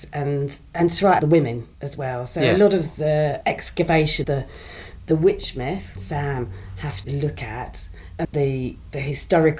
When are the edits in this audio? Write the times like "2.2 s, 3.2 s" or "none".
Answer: 1.2 s, 1.7 s, 3.4 s, 4.2 s, 6.0 s, 7.0 s, 8.2 s